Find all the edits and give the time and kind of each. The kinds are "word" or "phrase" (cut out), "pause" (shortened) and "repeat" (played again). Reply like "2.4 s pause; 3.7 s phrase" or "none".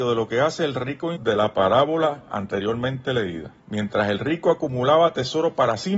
1.2 s word; 3.6 s pause